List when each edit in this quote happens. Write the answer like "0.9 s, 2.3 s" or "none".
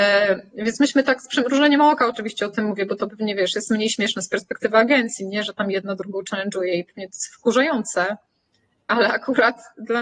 none